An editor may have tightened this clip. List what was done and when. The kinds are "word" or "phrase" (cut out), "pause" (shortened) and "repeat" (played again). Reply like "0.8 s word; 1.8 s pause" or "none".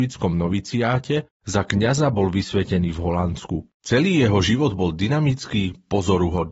3.7 s pause